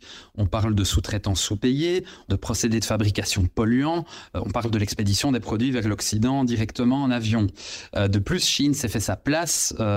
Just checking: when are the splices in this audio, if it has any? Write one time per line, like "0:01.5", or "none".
0:02.3